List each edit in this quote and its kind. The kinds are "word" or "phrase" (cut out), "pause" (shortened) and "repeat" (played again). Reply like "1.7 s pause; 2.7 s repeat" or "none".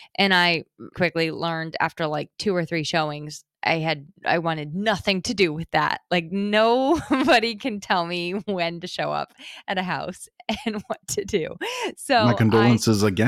0.9 s word; 2.3 s word; 4.2 s pause